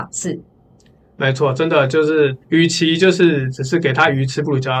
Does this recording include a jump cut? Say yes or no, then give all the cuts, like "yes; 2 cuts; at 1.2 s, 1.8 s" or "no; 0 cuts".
yes; 1 cut; at 2.4 s